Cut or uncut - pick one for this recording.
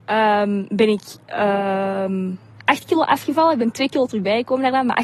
uncut